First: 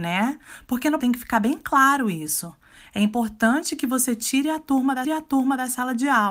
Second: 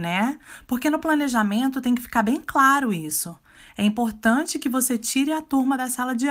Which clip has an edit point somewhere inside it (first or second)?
first